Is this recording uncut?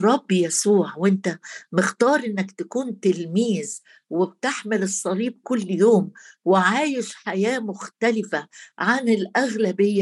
yes; 0 cuts

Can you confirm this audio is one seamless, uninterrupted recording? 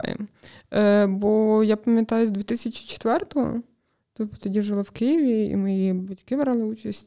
no; 1 cut; at 4.4 s

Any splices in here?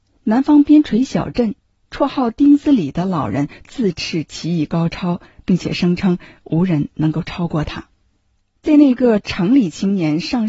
no; 0 cuts

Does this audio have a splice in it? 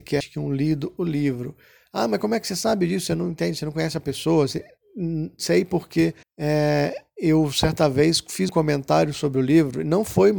yes; 2 cuts; at 6.2 s, 8.5 s

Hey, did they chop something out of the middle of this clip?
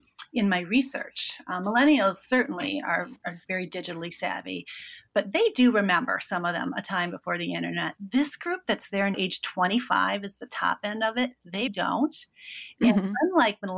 yes; 2 cuts; at 9.1 s, 11.7 s

